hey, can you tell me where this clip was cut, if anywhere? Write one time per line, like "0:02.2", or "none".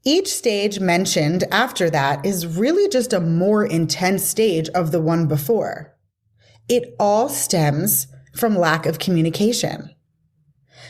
none

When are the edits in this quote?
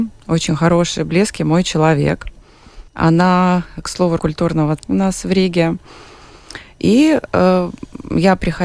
0:02.9
0:04.2
0:04.8

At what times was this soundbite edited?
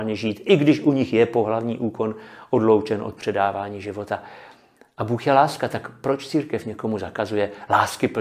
none

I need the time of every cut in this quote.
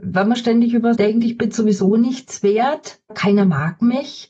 0:01.0
0:03.1

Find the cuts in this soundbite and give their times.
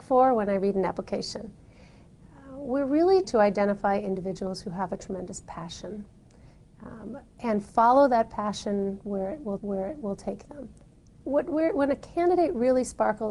0:03.2
0:09.6

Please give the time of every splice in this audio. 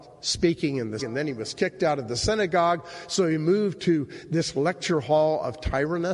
0:01.0

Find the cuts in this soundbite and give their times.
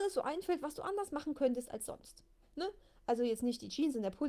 none

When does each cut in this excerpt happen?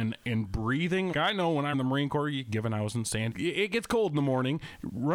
0:01.1
0:01.7
0:03.3

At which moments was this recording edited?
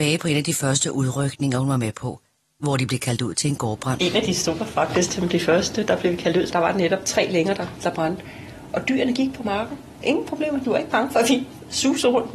0:06.5
0:10.6

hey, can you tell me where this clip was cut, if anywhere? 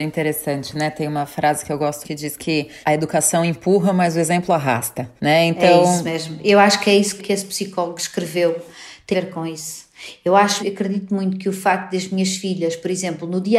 0:02.0
0:02.8
0:05.2
0:07.2
0:09.1
0:10.6

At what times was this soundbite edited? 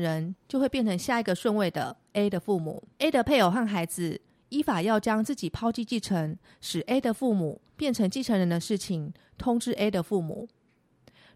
0:02.9

